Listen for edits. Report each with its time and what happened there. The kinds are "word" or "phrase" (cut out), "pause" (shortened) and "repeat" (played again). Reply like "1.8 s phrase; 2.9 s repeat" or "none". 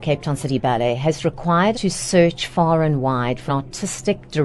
1.7 s word; 3.5 s word